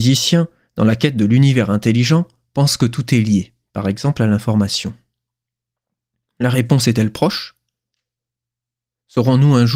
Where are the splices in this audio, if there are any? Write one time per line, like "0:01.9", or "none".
none